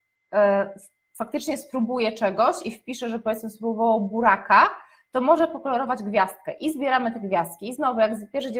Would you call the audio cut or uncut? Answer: uncut